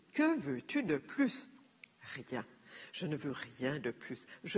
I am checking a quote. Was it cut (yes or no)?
no